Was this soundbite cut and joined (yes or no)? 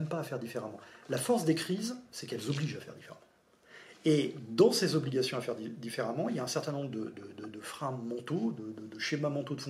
no